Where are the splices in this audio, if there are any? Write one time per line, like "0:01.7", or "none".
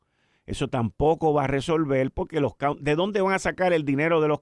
none

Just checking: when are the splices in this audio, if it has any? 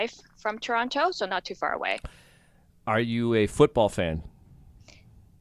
none

